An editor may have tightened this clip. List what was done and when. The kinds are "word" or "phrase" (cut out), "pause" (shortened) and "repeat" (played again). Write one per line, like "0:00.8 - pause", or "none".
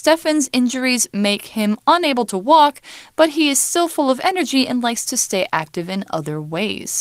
none